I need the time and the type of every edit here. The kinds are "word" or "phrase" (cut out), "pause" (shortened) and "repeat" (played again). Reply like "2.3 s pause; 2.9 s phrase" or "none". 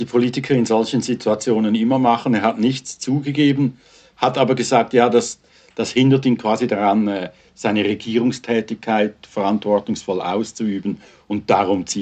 none